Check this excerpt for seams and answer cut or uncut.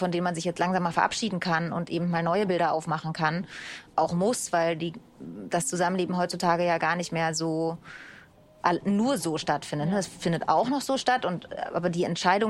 uncut